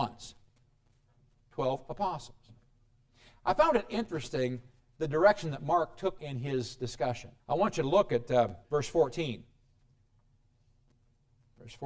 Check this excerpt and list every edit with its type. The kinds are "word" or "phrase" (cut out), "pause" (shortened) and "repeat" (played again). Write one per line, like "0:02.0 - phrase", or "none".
0:06.2 - word
0:07.4 - pause
0:08.6 - pause